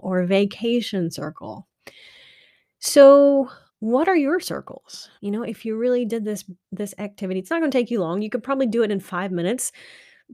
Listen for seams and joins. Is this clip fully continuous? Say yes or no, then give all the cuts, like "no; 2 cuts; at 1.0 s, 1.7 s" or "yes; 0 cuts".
no; 2 cuts; at 3.7 s, 5.2 s